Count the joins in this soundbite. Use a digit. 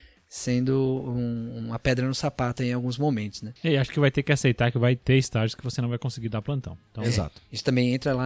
1